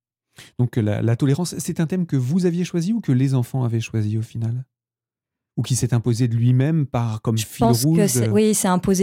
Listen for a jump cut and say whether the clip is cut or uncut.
uncut